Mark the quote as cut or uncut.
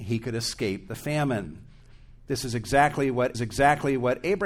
cut